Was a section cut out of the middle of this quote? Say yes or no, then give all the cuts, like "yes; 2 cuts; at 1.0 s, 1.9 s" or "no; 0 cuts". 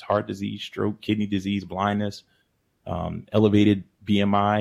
no; 0 cuts